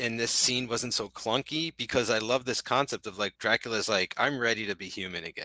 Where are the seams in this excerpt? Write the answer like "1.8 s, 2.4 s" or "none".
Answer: none